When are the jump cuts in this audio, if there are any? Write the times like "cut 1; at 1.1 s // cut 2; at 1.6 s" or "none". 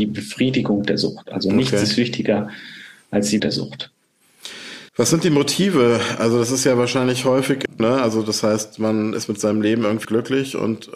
cut 1; at 3.4 s // cut 2; at 4.9 s // cut 3; at 7.8 s // cut 4; at 10.0 s